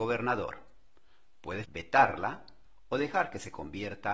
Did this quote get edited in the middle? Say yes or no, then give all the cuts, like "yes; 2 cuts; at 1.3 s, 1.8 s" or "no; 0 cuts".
yes; 1 cut; at 1.6 s